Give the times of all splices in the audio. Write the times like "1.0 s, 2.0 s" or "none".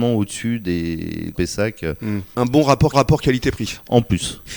1.3 s, 2.9 s